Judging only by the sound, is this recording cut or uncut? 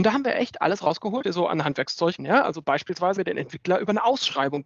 cut